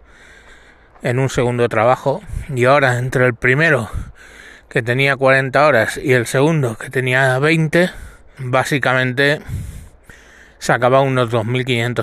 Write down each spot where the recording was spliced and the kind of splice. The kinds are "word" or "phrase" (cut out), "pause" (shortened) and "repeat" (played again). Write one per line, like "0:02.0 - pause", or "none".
0:08.4 - word